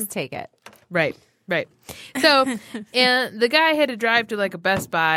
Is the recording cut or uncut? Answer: uncut